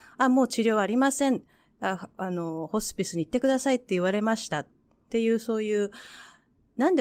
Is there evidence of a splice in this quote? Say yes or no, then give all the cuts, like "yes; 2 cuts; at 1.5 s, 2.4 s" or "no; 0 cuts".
no; 0 cuts